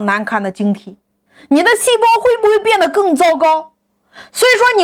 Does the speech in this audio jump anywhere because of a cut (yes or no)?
yes